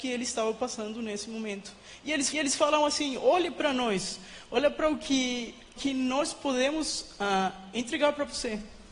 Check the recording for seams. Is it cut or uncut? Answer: cut